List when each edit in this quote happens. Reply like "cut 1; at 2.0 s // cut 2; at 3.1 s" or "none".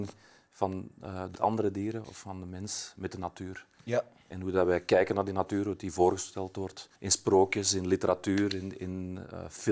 cut 1; at 1.3 s // cut 2; at 7.0 s